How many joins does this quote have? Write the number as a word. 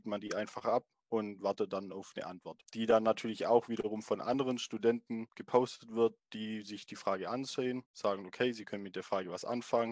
one